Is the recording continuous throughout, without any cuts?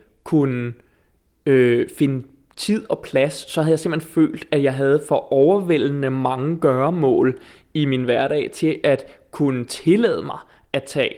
yes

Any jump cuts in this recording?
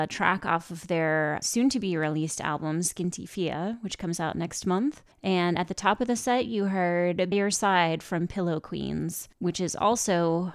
yes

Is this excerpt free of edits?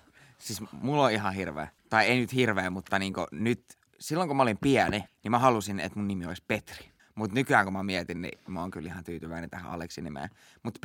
no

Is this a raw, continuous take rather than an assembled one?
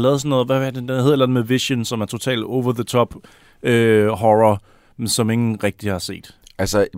yes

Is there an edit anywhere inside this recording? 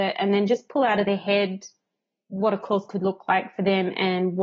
no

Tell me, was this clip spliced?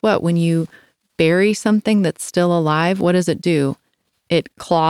no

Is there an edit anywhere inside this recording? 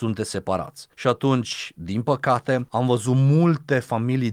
yes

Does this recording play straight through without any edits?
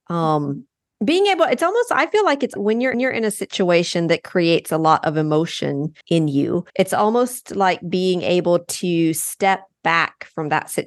no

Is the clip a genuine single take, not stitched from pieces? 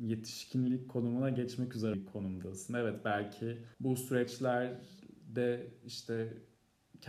no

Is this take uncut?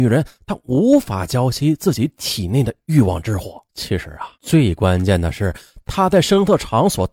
no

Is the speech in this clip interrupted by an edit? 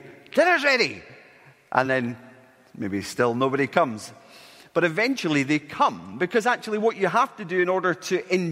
no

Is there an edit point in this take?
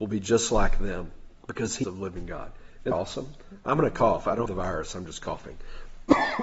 yes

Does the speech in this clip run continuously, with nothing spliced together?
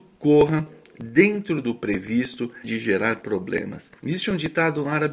no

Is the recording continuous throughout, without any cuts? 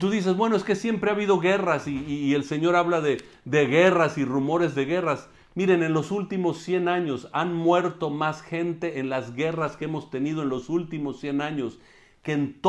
yes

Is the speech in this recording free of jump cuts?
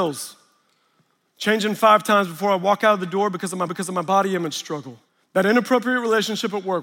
no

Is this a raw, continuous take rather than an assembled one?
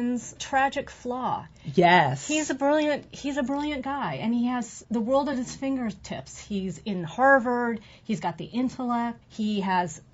yes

